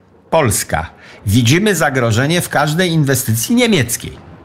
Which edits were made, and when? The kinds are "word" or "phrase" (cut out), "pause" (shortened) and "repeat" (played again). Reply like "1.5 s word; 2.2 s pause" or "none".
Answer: none